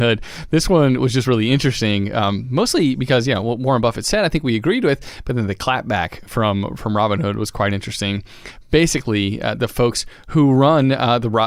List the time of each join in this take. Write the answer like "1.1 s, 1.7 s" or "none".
none